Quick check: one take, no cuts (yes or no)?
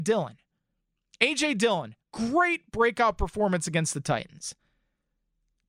no